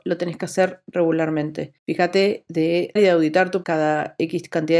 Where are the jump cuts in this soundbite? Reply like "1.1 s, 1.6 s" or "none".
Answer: 1.8 s, 3.0 s, 3.6 s